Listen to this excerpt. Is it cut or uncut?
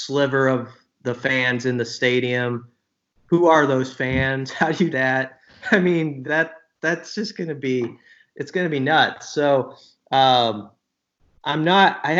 cut